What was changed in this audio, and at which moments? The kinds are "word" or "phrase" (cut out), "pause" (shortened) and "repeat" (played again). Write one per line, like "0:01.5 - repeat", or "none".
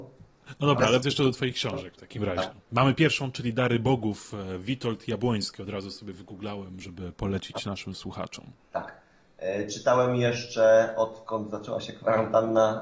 0:01.0 - word
0:02.6 - pause
0:08.6 - pause